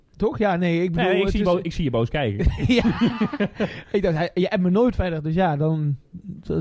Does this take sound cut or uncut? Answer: uncut